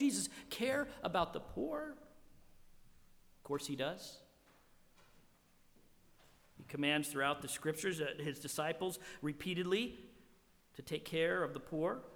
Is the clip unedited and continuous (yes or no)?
yes